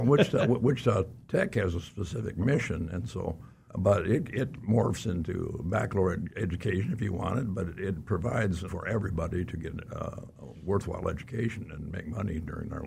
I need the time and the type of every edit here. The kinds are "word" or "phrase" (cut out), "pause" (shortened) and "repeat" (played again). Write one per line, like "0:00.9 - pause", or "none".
0:03.7 - pause
0:08.7 - word
0:10.3 - pause